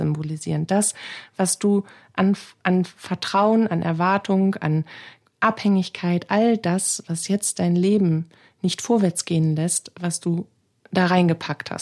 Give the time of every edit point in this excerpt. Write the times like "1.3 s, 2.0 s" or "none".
none